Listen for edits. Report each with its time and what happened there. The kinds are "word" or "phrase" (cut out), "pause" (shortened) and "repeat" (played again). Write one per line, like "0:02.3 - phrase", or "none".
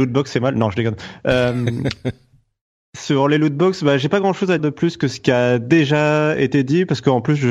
0:04.6 - word